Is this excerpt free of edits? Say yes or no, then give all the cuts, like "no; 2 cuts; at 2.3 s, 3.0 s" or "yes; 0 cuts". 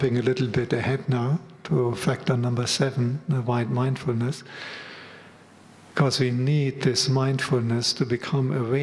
yes; 0 cuts